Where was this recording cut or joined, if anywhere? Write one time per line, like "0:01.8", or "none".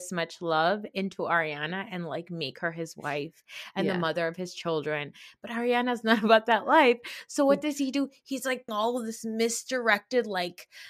0:08.7